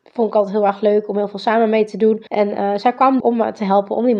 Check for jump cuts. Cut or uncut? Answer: cut